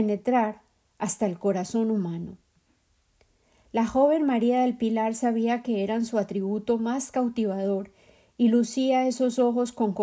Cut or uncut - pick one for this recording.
uncut